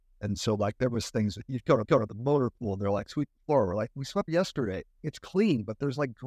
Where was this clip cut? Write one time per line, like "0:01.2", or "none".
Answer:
0:01.8
0:04.3
0:04.9